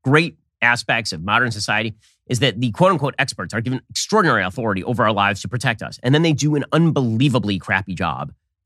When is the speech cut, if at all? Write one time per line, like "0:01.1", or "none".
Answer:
none